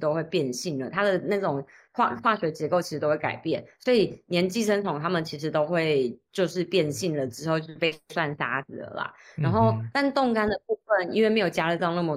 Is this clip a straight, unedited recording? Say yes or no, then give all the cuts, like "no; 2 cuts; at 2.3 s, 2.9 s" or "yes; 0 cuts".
yes; 0 cuts